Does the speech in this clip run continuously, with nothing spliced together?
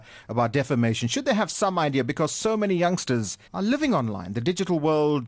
no; 1 cut; at 3.5 s

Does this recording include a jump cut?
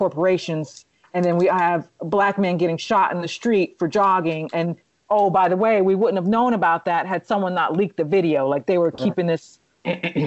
no; 0 cuts

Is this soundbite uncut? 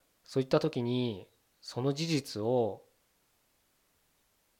yes; 0 cuts

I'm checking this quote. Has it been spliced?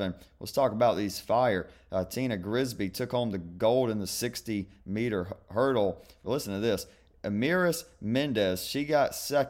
no; 0 cuts

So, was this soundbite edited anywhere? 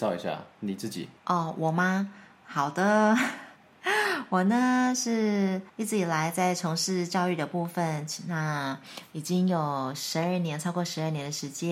yes; 2 cuts; at 1.2 s, 5.7 s

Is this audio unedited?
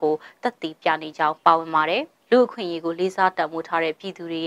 no; 1 cut; at 2.2 s

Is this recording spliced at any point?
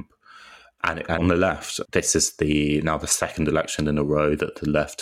yes; 2 cuts; at 1.2 s, 1.9 s

